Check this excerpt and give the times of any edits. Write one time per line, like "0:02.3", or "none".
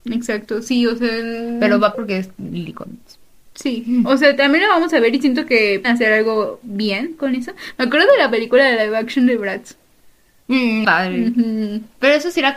0:01.9
0:05.8
0:10.8